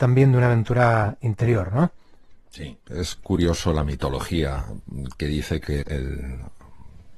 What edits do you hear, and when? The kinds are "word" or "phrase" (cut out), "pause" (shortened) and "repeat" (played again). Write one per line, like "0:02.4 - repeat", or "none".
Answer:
0:05.8 - word